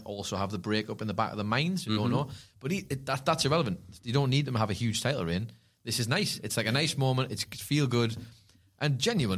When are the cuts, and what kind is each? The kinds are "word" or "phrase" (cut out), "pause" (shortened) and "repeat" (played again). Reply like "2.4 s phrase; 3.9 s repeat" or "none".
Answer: none

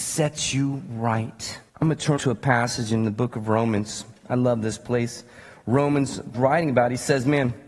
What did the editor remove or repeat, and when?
1.7 s pause; 2.2 s word; 6.3 s word

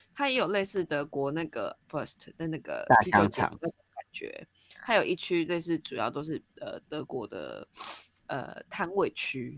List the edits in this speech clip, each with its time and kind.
1.9 s phrase

